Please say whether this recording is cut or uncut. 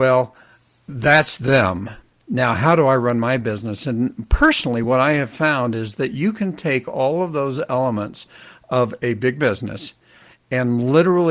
uncut